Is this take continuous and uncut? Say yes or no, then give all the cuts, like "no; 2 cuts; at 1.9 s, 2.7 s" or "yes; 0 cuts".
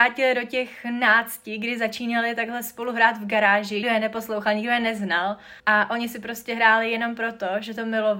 no; 2 cuts; at 3.8 s, 5.6 s